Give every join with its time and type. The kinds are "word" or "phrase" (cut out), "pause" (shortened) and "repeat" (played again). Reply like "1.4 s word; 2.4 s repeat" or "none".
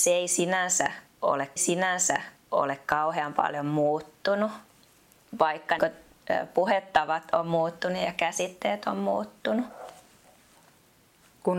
1.6 s repeat; 5.8 s word